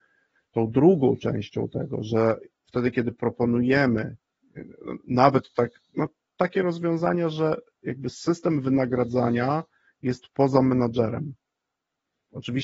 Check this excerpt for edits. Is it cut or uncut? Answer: uncut